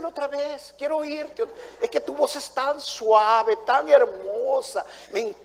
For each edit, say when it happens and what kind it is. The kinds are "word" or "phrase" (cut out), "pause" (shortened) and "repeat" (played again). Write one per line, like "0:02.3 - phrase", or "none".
none